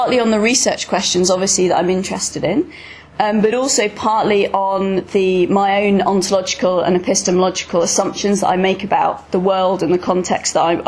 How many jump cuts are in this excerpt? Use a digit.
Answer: 0